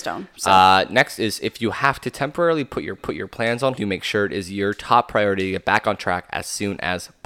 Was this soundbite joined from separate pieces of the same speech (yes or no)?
yes